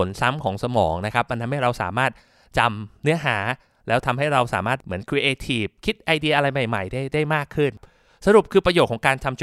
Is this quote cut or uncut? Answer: uncut